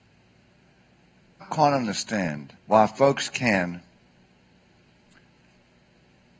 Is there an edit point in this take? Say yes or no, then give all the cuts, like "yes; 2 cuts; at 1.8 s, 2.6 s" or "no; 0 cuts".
yes; 2 cuts; at 1.4 s, 2.6 s